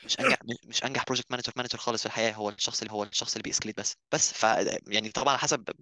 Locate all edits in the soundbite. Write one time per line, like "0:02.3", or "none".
0:01.5
0:02.9
0:04.0
0:04.8